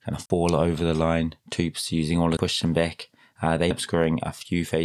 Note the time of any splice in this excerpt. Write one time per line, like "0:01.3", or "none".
0:01.4
0:02.4
0:03.7